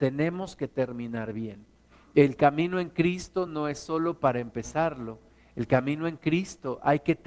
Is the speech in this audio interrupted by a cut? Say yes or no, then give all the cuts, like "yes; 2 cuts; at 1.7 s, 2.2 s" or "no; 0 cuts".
no; 0 cuts